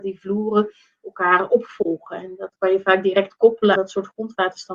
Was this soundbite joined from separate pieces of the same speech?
yes; 1 cut; at 3.8 s

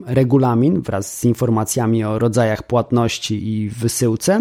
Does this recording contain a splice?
no; 0 cuts

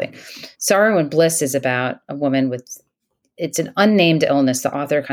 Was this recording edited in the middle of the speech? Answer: no; 0 cuts

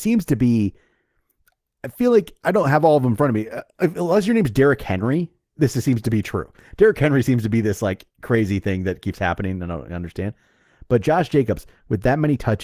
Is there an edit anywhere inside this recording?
yes; 1 cut; at 8.1 s

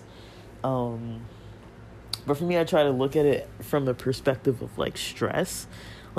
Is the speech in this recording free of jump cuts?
yes; 0 cuts

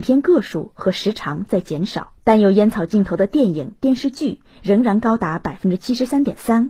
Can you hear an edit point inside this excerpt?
yes; 1 cut; at 2.2 s

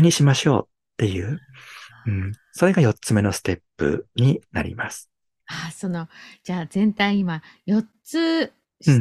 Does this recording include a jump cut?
no; 0 cuts

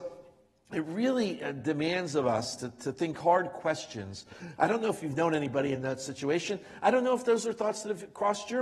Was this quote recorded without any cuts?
yes; 0 cuts

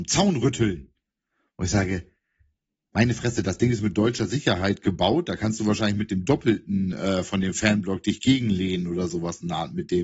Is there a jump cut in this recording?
no; 0 cuts

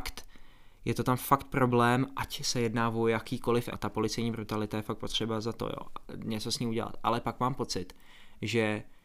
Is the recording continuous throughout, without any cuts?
no; 1 cut; at 3.7 s

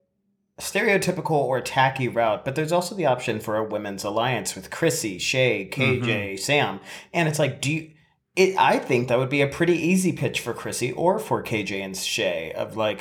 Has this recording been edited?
no; 0 cuts

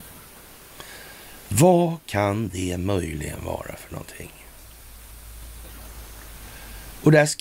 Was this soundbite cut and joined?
no; 0 cuts

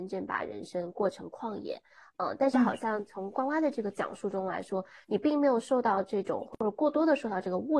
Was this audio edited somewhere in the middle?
no; 0 cuts

